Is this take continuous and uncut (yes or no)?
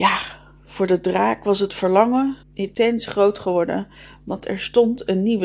no